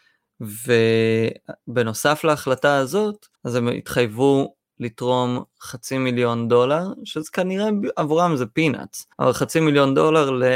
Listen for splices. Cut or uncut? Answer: cut